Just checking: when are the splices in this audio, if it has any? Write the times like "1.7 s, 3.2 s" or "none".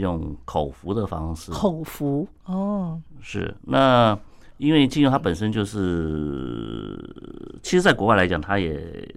none